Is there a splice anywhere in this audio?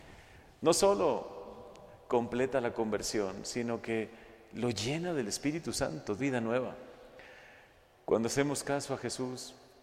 yes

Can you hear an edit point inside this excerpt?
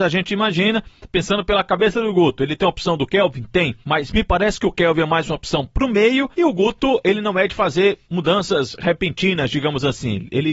yes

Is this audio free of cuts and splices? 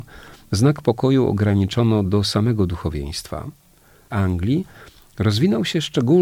no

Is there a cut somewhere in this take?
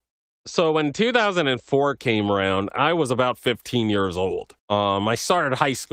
yes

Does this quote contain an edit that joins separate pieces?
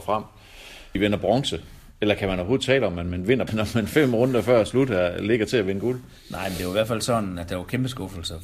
yes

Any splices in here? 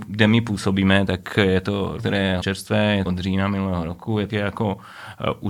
yes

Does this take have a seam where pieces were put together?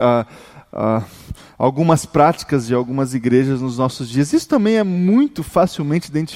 no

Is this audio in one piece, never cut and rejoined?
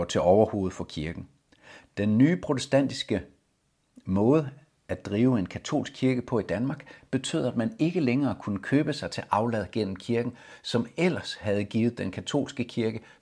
yes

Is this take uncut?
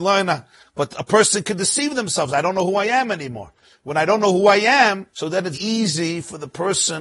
no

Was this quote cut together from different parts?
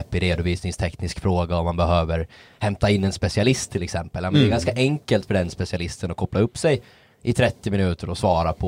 no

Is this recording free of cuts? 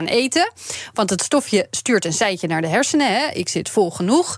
yes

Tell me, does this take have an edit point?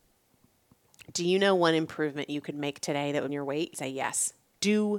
yes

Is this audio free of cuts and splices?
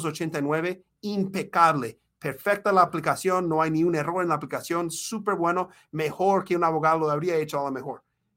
yes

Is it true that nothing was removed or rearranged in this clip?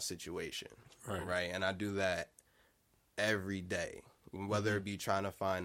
no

